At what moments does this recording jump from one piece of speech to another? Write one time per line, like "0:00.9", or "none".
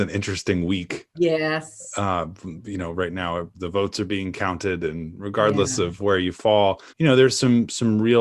0:01.1
0:03.5
0:06.0
0:06.9